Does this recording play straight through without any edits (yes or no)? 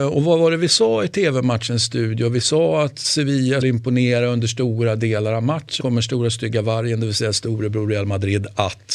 no